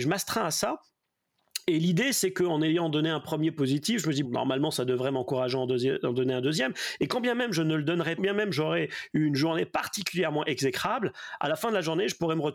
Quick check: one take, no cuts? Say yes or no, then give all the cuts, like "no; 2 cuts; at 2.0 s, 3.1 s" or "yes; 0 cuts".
no; 2 cuts; at 4.2 s, 8.2 s